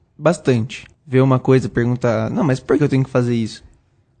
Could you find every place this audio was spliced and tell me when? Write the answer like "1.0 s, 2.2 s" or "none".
0.9 s, 2.8 s